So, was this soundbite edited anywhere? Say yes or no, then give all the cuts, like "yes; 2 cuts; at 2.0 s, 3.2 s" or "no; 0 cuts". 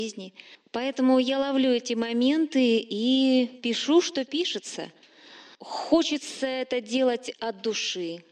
no; 0 cuts